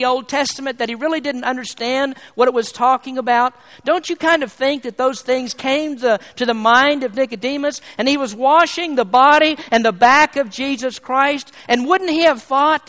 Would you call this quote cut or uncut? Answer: uncut